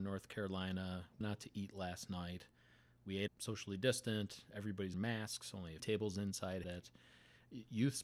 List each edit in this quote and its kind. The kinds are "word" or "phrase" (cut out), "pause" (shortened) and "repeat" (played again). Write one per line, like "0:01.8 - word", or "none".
0:01.2 - word
0:03.3 - word
0:04.9 - word
0:05.8 - word
0:06.6 - word